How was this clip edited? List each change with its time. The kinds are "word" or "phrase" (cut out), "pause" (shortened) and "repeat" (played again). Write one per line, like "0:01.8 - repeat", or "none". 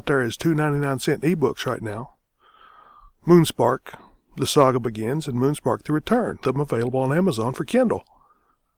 0:06.4 - word